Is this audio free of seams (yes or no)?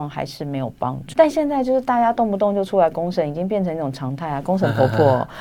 no